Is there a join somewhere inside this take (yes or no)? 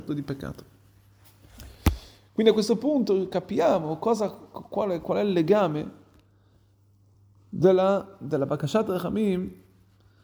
no